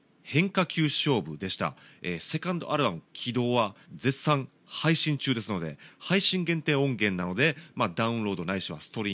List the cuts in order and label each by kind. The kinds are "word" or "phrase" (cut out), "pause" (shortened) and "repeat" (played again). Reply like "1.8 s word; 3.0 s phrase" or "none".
3.8 s pause